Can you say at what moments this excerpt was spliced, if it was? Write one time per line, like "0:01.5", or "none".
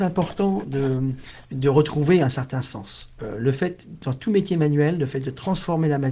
0:01.4

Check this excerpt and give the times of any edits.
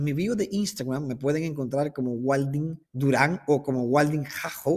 0:02.8

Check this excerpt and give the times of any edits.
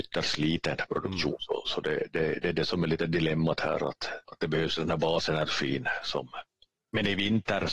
0:04.2

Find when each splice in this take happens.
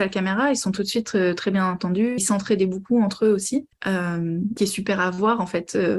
0:02.2
0:04.6

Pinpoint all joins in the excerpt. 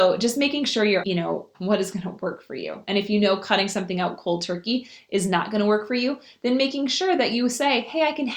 0:01.0
0:01.5

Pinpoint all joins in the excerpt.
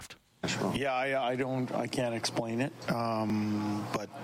none

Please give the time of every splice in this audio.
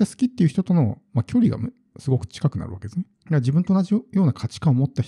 0:03.1

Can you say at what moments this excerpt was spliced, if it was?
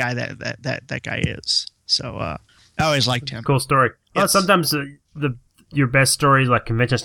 none

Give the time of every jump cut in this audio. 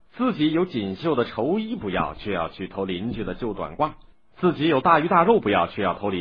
none

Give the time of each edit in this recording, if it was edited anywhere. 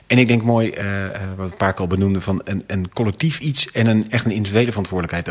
none

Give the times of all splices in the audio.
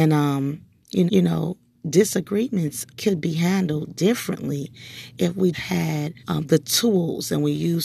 0:01.1
0:02.9
0:05.5
0:06.2

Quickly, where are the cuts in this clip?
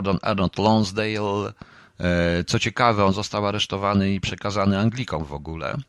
none

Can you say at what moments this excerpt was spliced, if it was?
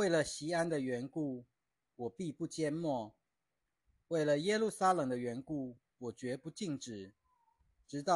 none

